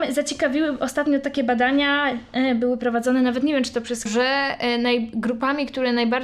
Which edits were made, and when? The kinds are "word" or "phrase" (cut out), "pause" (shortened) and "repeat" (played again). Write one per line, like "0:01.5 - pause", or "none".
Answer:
0:04.1 - phrase